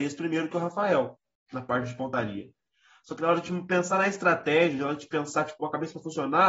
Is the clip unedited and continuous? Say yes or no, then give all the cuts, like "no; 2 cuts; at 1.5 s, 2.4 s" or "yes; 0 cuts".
yes; 0 cuts